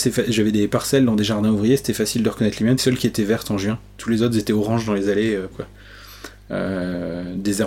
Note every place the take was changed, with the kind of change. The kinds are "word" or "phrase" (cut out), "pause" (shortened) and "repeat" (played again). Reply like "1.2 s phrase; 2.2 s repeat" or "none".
2.8 s phrase; 5.5 s word